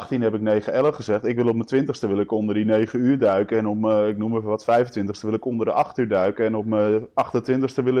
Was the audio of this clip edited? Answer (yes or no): no